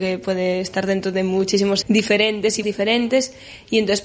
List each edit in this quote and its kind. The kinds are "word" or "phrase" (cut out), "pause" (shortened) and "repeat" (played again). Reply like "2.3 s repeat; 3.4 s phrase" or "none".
1.8 s word; 2.6 s word